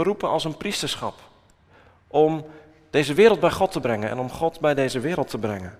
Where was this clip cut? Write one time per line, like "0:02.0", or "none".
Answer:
none